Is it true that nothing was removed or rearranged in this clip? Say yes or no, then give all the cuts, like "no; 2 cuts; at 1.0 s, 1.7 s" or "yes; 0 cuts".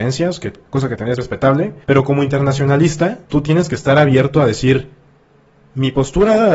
no; 3 cuts; at 1.2 s, 1.8 s, 3.2 s